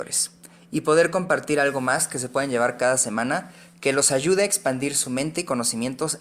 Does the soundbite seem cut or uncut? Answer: uncut